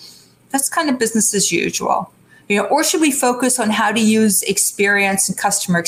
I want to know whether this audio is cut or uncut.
uncut